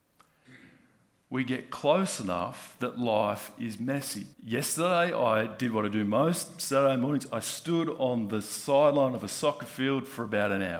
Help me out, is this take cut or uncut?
cut